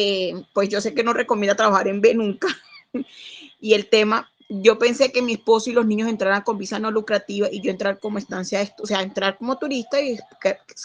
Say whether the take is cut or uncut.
uncut